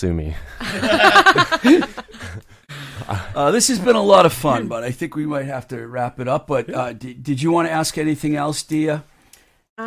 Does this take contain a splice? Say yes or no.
no